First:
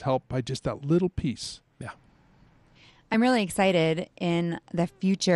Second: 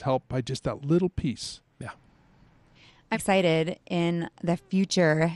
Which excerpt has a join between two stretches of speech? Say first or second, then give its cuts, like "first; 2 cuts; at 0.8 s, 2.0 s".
second; 1 cut; at 3.1 s